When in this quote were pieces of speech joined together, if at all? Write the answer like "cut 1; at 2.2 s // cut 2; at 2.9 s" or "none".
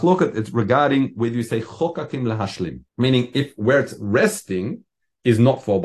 cut 1; at 2.9 s